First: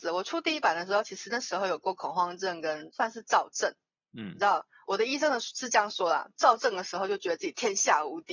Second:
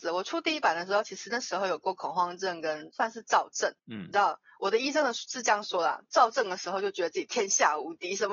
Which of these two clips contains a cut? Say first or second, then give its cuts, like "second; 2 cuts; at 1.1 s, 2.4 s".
second; 1 cut; at 3.8 s